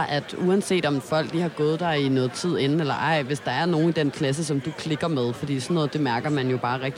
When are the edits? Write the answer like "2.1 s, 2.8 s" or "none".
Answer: none